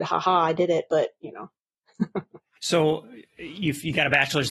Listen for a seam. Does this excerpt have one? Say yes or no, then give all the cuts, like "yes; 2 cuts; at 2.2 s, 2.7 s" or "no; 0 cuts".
yes; 1 cut; at 2.6 s